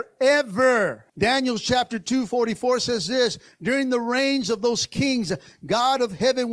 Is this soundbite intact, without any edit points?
no; 1 cut; at 1.1 s

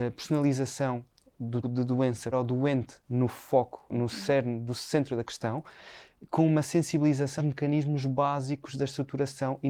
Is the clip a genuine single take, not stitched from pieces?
no; 5 cuts; at 1.6 s, 2.3 s, 3.0 s, 3.9 s, 7.4 s

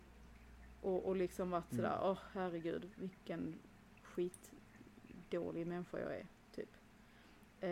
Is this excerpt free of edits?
yes; 0 cuts

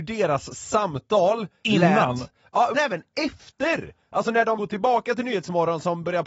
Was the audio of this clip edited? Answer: yes; 2 cuts; at 2.7 s, 4.6 s

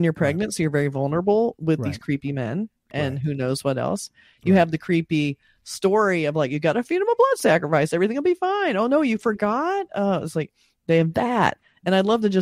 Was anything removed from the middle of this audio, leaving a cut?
no; 0 cuts

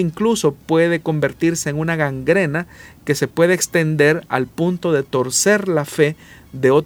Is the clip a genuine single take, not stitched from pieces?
yes; 0 cuts

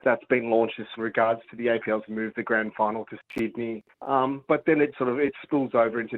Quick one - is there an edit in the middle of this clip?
yes; 4 cuts; at 1.0 s, 2.1 s, 3.9 s, 4.9 s

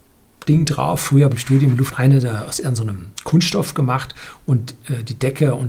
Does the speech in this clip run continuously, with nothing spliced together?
no; 3 cuts; at 1.3 s, 1.9 s, 3.1 s

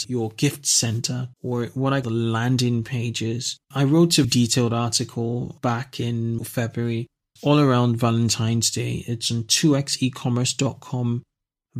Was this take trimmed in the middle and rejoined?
yes; 6 cuts; at 1.3 s, 2.0 s, 3.6 s, 4.2 s, 6.4 s, 7.4 s

